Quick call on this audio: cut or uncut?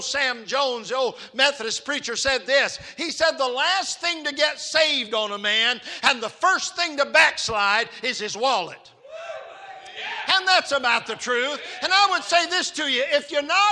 uncut